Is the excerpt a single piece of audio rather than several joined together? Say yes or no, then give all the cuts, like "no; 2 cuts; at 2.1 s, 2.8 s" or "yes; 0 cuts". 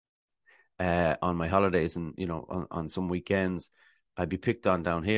yes; 0 cuts